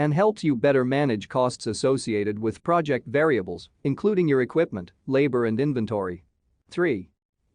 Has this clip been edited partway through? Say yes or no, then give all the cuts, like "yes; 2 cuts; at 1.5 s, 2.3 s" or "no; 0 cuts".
no; 0 cuts